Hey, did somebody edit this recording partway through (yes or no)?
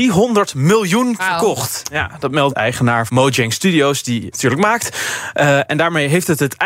yes